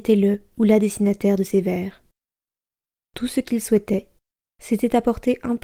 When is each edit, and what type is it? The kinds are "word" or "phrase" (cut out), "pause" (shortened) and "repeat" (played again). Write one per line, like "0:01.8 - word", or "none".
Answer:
none

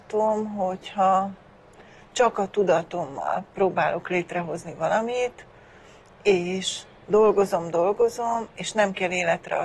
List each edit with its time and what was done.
none

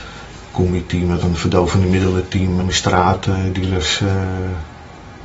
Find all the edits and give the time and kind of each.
0:01.2 - word
0:02.6 - word

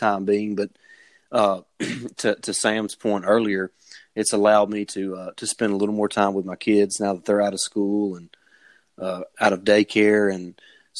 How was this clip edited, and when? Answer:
none

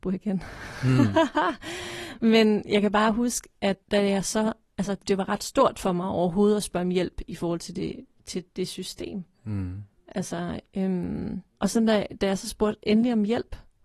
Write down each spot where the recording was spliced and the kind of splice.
0:03.8 - pause
0:05.0 - word
0:08.5 - pause
0:09.3 - pause
0:11.5 - pause

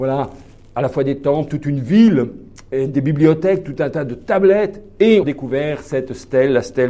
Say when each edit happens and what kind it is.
0:05.2 - phrase

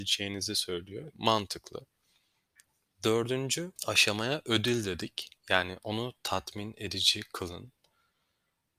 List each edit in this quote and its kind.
0:01.1 - phrase
0:03.8 - pause
0:05.4 - pause

